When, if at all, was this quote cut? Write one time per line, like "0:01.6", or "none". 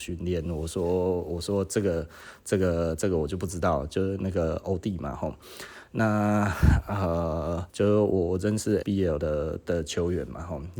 0:07.7
0:08.8

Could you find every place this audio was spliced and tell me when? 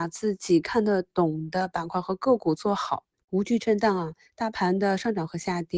none

